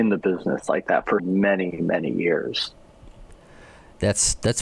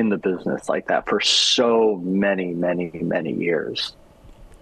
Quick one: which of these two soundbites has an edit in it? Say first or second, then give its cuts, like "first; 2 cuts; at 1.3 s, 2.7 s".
first; 2 cuts; at 1.2 s, 1.7 s